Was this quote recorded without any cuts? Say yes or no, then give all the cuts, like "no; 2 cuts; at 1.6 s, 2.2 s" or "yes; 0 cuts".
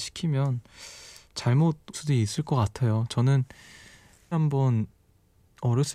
no; 2 cuts; at 1.9 s, 4.3 s